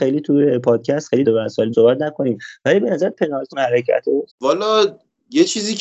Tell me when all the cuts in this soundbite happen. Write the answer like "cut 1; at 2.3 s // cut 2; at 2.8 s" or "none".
cut 1; at 1.2 s // cut 2; at 1.7 s // cut 3; at 3.5 s // cut 4; at 4.3 s